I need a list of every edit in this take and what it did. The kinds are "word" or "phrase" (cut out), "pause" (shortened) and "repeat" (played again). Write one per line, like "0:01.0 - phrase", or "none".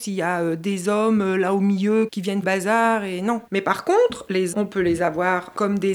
0:02.1 - word
0:02.4 - phrase
0:03.5 - pause
0:04.5 - word